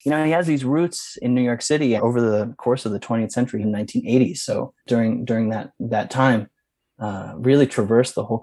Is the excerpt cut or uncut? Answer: cut